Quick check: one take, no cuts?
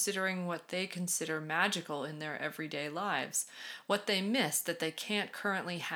yes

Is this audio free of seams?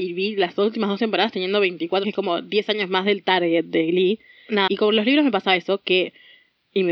no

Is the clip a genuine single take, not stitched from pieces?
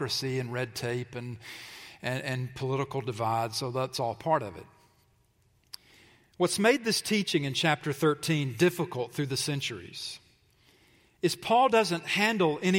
yes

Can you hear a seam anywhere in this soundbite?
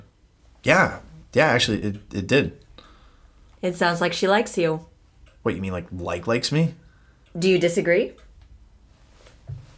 no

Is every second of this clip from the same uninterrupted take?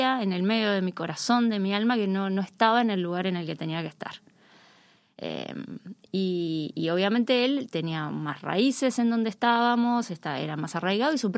yes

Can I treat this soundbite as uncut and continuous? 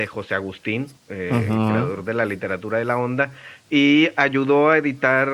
no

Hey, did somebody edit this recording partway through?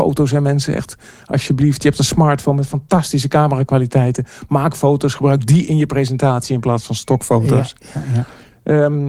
no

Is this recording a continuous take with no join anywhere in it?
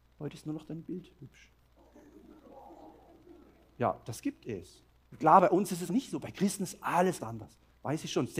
no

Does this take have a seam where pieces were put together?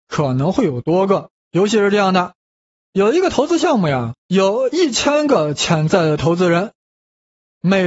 yes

